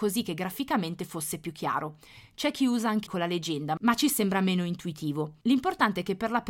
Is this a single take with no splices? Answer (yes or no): no